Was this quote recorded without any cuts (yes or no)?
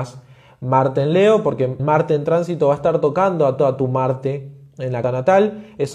no